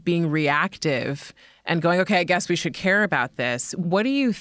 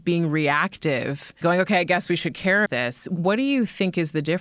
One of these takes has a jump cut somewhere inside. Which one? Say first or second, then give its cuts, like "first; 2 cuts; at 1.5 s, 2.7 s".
second; 2 cuts; at 1.4 s, 2.7 s